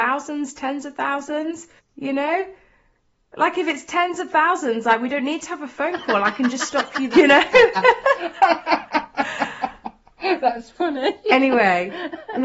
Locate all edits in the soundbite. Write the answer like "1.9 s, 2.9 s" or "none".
1.8 s, 7.1 s

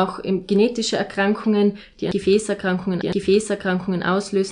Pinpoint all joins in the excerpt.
3.0 s

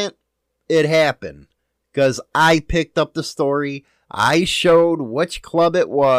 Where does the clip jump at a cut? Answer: none

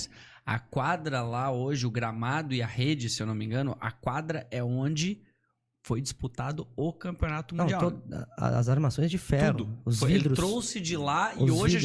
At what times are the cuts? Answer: none

